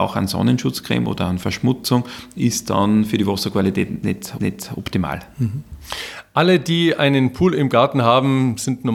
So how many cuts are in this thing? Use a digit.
1